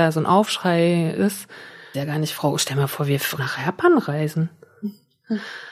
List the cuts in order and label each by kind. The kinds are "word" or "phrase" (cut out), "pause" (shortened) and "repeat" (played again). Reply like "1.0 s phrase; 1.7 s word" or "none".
1.9 s word; 3.4 s word